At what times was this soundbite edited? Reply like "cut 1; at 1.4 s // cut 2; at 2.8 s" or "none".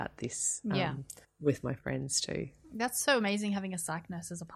cut 1; at 1.2 s